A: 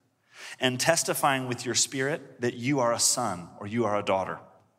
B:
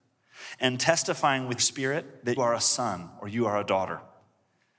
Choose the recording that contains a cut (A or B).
B